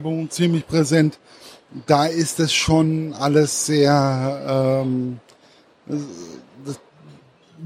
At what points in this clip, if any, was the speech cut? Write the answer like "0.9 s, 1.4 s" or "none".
none